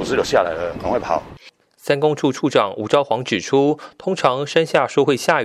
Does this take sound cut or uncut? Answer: uncut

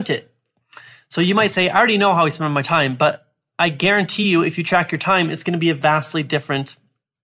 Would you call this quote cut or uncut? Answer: uncut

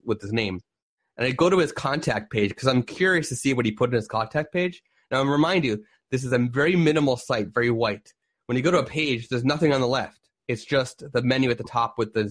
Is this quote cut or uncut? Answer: uncut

